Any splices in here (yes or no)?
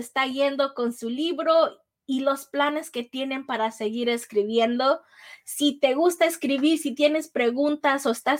no